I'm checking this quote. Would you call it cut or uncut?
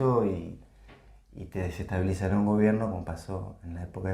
uncut